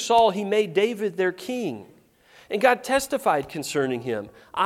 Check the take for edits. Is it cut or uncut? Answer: uncut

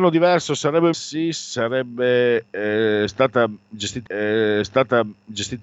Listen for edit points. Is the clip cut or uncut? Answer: cut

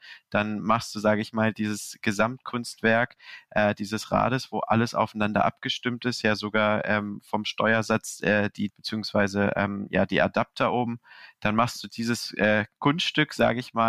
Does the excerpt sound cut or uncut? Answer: cut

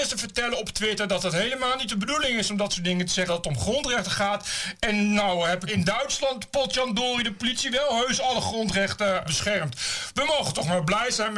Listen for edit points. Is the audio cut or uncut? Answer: cut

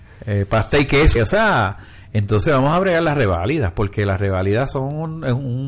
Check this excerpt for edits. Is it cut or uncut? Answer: cut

